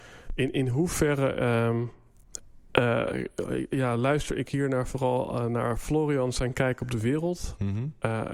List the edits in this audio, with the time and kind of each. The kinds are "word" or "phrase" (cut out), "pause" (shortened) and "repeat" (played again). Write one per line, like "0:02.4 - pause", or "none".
none